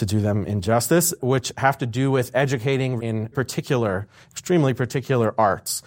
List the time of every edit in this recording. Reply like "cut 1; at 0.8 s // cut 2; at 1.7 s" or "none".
cut 1; at 1.2 s // cut 2; at 3.0 s // cut 3; at 3.3 s